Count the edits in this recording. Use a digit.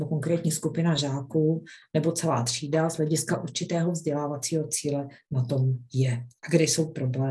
0